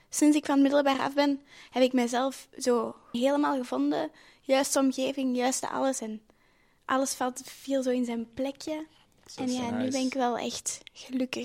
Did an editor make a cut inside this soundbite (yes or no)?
yes